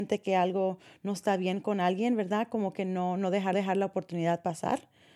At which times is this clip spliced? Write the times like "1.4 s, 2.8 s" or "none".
3.5 s